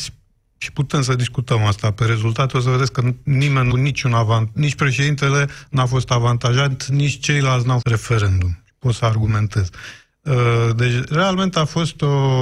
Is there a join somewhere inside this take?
yes; 2 cuts; at 3.7 s, 7.8 s

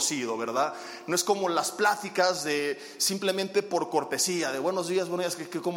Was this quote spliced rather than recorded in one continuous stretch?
no; 0 cuts

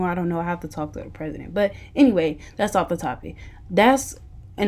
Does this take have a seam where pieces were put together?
no; 0 cuts

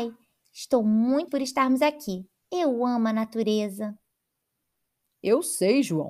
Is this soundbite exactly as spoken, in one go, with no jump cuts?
no; 2 cuts; at 1.3 s, 2.4 s

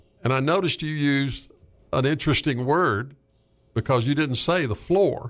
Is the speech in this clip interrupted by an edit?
no; 0 cuts

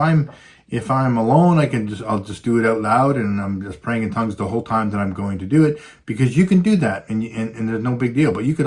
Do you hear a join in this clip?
no; 0 cuts

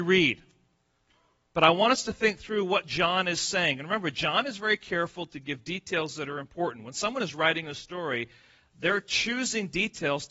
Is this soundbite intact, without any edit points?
yes; 0 cuts

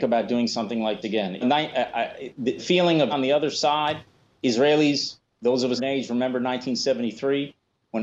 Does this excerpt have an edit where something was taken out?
yes; 6 cuts; at 1.0 s, 1.4 s, 2.6 s, 3.1 s, 4.4 s, 5.8 s

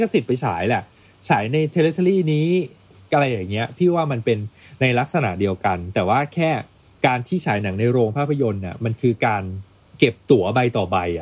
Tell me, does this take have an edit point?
no; 0 cuts

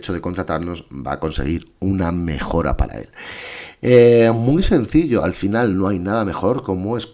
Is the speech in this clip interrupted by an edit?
no; 0 cuts

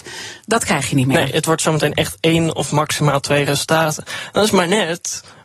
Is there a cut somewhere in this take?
no; 0 cuts

